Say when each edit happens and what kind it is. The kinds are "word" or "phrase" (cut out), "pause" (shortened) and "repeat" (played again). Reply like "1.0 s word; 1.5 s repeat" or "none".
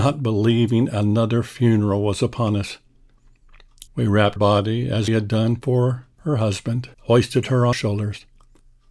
3.9 s pause; 4.4 s word; 5.1 s word; 6.1 s pause; 6.9 s pause; 7.7 s word